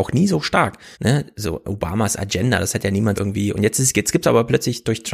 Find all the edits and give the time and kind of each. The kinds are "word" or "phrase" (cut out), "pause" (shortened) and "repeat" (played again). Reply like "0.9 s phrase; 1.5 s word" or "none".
0.9 s pause; 3.1 s word